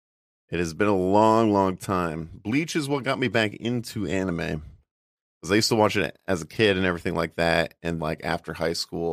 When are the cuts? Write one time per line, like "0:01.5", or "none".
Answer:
0:08.0